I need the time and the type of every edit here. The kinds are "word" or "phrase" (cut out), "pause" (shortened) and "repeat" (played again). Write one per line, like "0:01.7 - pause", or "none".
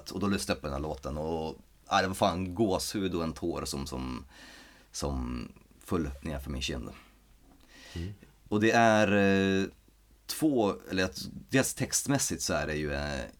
none